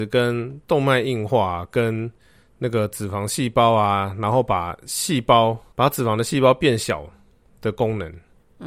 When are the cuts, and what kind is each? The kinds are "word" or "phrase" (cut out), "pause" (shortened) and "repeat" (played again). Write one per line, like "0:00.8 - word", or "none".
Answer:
0:05.7 - pause